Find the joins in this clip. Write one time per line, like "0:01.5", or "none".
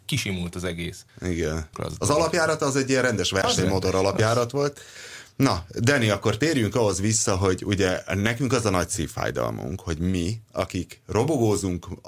0:01.1
0:01.7
0:10.4